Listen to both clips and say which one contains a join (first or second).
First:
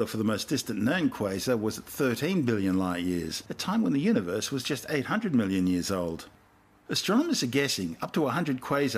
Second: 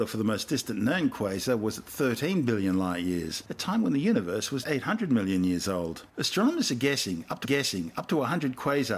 second